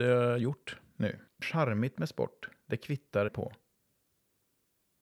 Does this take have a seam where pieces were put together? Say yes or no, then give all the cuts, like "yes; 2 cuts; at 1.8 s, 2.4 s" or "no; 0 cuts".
yes; 2 cuts; at 1.4 s, 3.3 s